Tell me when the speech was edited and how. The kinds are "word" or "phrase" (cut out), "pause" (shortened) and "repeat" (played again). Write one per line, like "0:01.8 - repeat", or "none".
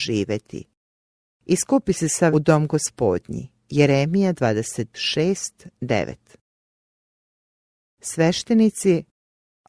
0:02.3 - phrase
0:03.6 - pause